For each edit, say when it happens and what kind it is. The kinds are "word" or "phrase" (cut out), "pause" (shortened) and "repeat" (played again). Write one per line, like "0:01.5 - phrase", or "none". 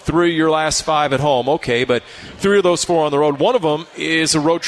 0:02.9 - word